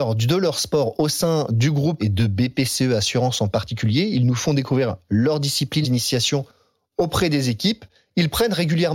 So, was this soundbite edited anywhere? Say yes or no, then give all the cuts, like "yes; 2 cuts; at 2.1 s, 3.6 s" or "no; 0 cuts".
yes; 2 cuts; at 2.0 s, 5.8 s